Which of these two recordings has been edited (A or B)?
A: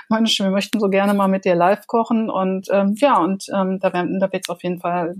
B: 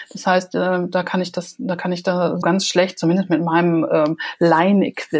B